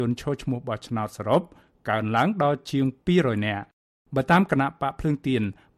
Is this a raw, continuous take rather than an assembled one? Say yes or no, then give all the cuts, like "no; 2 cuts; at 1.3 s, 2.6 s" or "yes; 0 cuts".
yes; 0 cuts